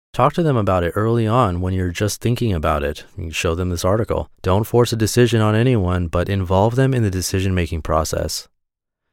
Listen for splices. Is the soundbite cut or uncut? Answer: cut